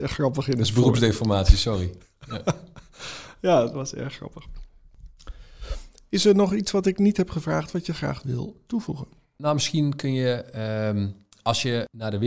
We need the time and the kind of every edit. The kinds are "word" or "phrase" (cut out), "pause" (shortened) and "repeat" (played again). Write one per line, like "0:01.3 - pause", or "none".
none